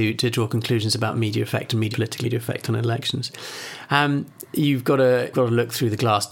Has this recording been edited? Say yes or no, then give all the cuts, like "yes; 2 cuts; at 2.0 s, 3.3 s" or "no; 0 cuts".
yes; 3 cuts; at 1.9 s, 2.2 s, 5.3 s